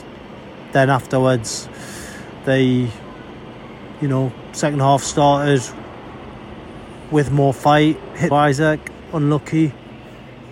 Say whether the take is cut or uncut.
cut